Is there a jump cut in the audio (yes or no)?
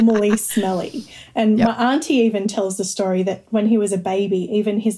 no